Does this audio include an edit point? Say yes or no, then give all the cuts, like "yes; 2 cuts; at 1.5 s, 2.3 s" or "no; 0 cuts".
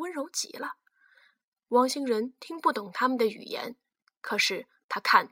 no; 0 cuts